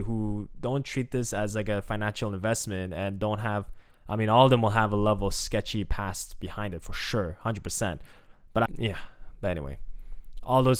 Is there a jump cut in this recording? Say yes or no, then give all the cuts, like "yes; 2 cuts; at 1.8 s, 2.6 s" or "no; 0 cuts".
yes; 1 cut; at 8.7 s